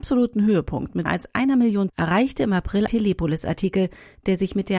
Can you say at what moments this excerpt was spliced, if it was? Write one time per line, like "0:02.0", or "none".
0:01.1
0:01.9
0:02.9